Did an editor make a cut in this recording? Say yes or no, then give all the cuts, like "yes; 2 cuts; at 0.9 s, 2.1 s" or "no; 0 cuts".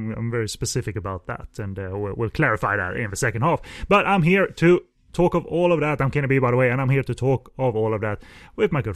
no; 0 cuts